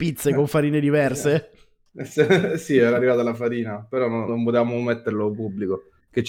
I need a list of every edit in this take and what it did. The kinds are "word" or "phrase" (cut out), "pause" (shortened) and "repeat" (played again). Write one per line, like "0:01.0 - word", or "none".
0:04.3 - word